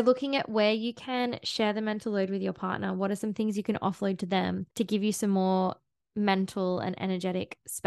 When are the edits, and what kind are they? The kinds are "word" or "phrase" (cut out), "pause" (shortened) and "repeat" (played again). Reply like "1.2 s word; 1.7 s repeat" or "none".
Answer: 4.7 s pause